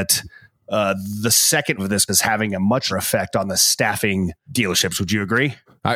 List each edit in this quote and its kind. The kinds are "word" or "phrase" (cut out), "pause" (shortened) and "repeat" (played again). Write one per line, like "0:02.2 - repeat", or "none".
0:01.8 - word
0:02.1 - word
0:02.9 - word
0:04.5 - word